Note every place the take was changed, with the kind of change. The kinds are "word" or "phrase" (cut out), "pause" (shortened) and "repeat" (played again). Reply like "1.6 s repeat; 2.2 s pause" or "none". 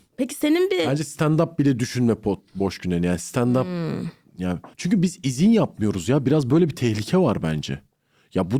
4.7 s pause